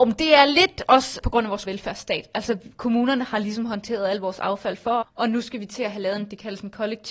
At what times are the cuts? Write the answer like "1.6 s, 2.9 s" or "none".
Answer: 1.2 s, 1.6 s, 5.0 s